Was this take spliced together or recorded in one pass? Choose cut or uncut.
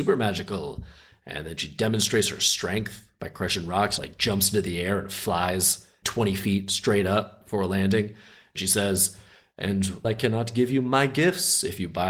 cut